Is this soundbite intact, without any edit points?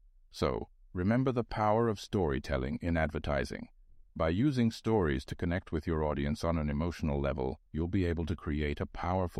no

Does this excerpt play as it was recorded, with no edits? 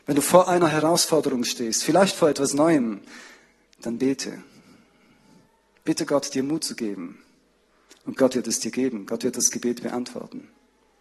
yes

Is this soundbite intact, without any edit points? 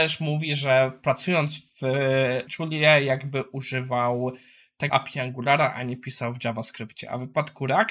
no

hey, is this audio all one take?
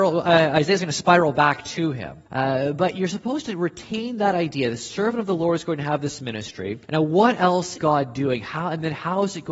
no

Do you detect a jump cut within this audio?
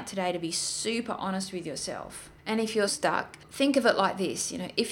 yes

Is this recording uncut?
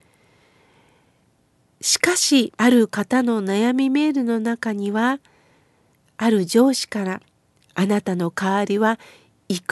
no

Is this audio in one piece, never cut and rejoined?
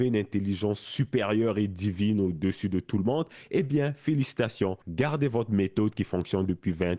no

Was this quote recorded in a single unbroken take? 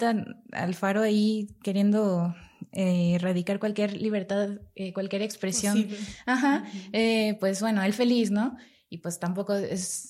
yes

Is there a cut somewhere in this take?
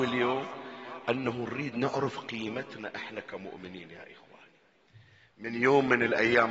no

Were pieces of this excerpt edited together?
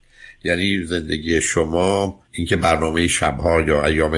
yes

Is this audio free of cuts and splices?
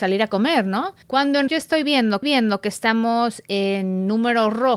no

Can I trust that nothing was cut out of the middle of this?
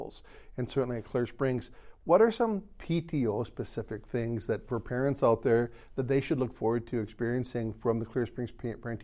yes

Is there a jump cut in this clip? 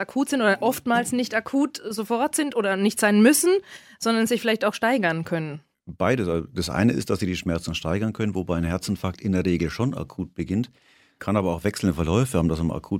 no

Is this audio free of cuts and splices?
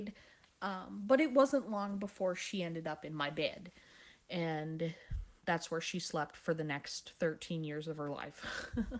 no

